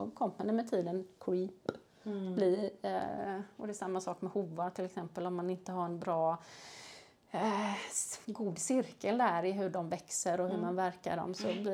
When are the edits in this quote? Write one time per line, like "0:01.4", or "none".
0:08.2